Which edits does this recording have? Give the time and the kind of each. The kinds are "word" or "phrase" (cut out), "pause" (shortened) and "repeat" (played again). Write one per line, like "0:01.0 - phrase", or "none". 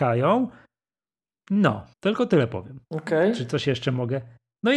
0:01.9 - pause
0:02.8 - pause